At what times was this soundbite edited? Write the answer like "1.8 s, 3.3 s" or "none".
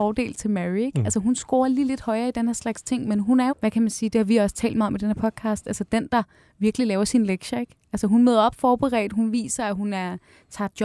3.5 s

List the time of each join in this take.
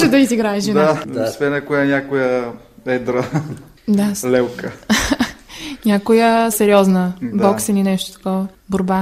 6.5 s

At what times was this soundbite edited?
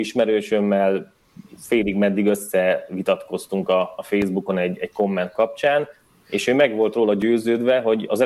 none

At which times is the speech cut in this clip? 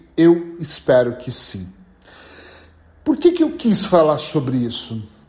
none

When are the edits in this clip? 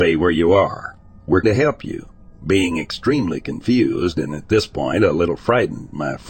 1.4 s

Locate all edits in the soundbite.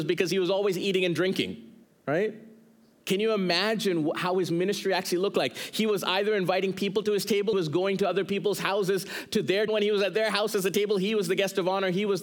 1.9 s, 7.5 s, 9.7 s

